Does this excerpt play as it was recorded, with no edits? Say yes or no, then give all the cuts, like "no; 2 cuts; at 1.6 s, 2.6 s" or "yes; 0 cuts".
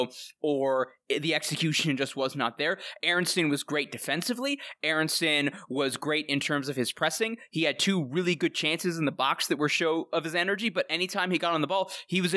yes; 0 cuts